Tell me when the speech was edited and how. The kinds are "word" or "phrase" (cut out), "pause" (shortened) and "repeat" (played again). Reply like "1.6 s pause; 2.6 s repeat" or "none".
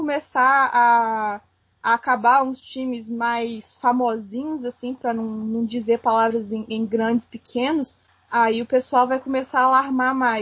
none